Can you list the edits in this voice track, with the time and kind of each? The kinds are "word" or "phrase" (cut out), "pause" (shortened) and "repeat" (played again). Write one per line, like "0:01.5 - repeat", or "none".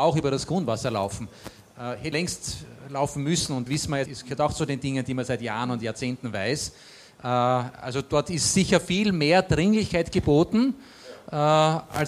0:02.1 - word
0:03.7 - word
0:04.1 - word